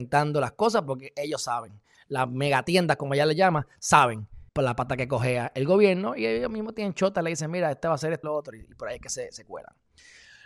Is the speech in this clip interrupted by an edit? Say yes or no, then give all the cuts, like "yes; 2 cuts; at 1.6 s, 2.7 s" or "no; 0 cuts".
yes; 2 cuts; at 4.5 s, 8.2 s